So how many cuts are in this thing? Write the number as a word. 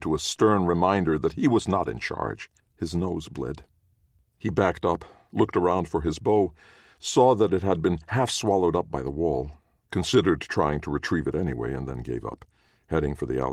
one